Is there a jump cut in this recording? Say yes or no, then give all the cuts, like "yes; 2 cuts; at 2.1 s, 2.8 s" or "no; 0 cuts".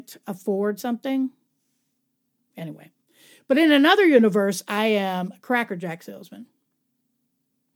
no; 0 cuts